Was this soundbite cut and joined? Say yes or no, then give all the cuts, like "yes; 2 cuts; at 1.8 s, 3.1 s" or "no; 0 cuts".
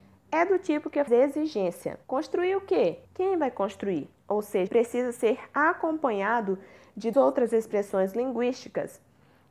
yes; 6 cuts; at 1.1 s, 2.0 s, 3.0 s, 4.2 s, 4.7 s, 7.1 s